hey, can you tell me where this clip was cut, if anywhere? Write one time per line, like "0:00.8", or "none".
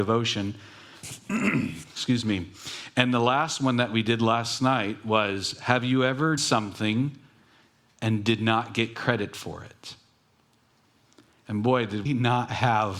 0:06.4
0:12.1